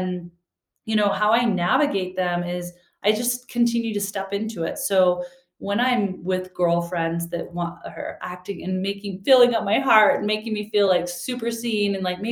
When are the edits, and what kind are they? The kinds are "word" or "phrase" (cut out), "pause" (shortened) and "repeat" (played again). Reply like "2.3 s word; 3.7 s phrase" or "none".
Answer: none